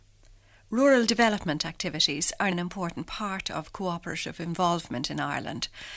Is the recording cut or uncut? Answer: cut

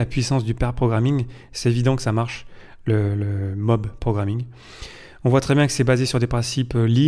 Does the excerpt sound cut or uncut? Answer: uncut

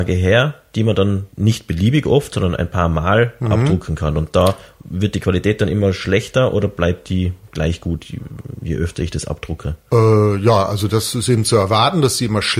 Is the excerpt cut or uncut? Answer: cut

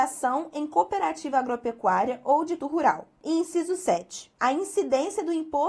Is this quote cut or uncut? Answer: cut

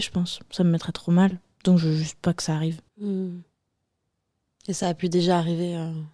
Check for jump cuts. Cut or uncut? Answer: cut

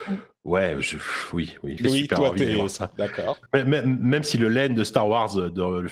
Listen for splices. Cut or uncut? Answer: cut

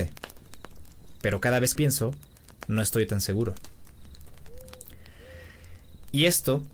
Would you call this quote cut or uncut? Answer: cut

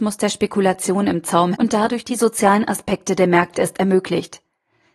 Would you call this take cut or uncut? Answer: cut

